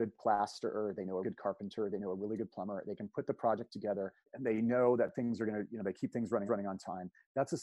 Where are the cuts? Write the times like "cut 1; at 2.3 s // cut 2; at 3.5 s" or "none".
cut 1; at 1.2 s // cut 2; at 4.2 s // cut 3; at 6.5 s